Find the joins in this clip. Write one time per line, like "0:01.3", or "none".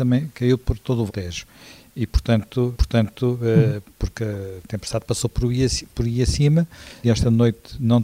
0:01.1
0:02.7
0:07.0